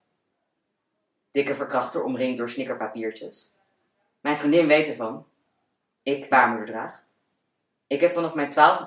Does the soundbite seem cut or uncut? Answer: cut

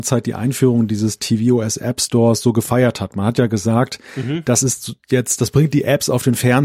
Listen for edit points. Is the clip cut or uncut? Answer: uncut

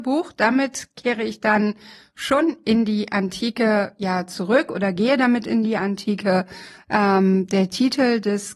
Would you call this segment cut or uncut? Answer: uncut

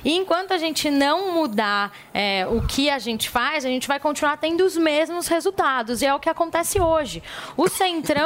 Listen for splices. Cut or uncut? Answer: uncut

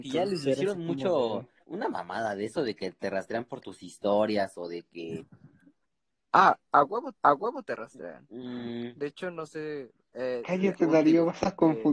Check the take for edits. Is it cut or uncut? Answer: cut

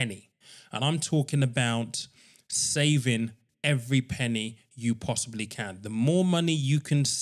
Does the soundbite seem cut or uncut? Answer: uncut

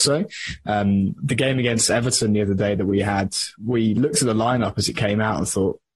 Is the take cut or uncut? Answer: uncut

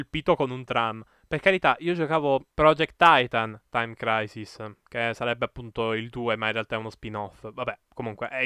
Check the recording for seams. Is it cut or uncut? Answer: cut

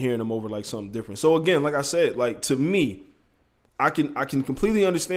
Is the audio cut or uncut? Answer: uncut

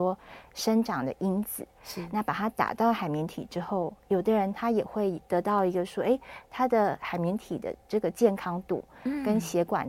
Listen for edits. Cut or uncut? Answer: uncut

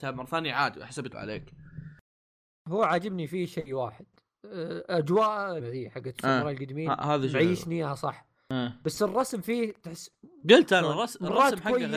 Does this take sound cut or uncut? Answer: cut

